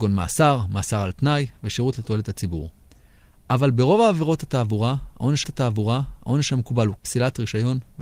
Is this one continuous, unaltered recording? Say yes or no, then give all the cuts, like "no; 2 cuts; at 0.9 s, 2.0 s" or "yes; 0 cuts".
no; 2 cuts; at 5.4 s, 7.0 s